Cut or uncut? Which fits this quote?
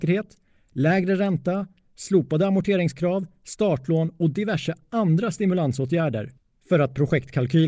uncut